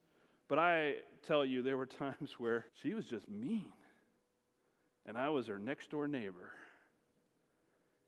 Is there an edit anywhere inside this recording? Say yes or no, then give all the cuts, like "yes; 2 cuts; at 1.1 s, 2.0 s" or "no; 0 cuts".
yes; 1 cut; at 2.7 s